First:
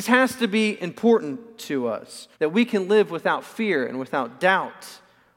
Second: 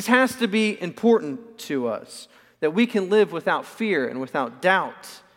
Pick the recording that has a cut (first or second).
first